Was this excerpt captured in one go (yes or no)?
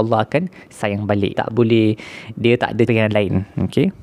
no